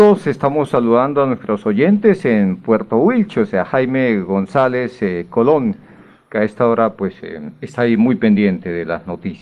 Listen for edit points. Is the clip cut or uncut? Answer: uncut